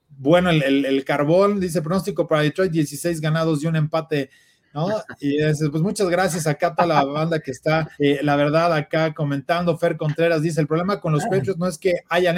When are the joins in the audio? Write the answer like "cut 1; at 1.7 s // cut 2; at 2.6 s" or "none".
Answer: cut 1; at 5.7 s // cut 2; at 7.9 s